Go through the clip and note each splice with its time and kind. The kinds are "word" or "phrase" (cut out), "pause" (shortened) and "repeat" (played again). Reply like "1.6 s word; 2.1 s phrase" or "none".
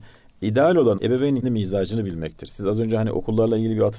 1.0 s word; 1.4 s word